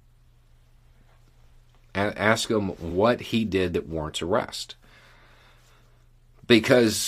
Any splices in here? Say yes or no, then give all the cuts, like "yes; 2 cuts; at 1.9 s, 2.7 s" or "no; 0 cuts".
no; 0 cuts